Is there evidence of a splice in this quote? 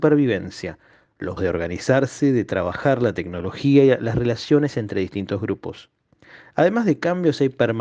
yes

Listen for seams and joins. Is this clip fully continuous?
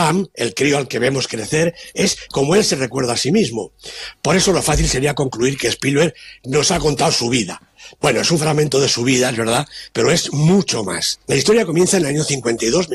no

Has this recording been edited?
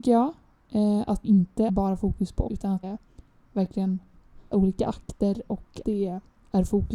yes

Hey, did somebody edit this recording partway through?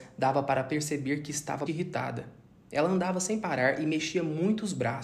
yes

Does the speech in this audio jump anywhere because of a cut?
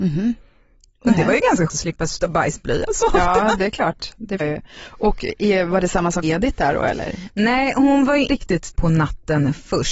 yes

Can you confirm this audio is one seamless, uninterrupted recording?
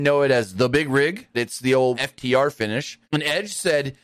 no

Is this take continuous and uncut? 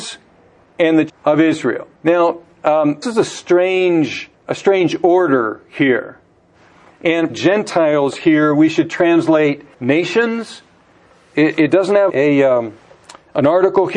no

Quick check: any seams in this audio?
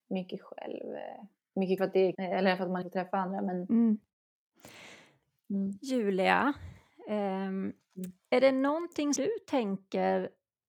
yes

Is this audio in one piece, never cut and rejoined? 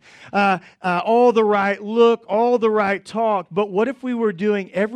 yes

